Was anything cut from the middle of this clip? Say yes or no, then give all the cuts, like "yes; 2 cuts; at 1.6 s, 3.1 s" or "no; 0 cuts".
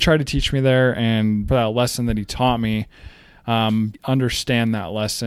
yes; 2 cuts; at 1.5 s, 3.9 s